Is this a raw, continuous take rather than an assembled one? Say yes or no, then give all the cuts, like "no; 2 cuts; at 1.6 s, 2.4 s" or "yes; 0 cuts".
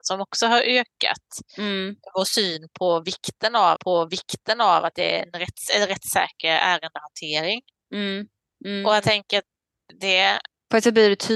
no; 1 cut; at 3.8 s